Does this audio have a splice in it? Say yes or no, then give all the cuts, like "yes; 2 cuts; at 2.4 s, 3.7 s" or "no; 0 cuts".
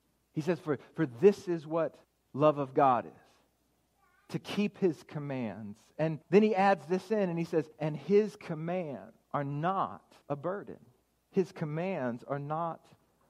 yes; 6 cuts; at 2.0 s, 6.2 s, 7.7 s, 9.2 s, 10.2 s, 11.0 s